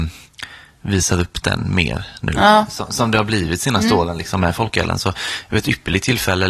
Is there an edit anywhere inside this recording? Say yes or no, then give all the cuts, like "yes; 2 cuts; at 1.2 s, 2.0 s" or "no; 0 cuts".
no; 0 cuts